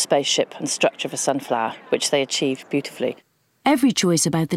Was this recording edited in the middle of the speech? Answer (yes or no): yes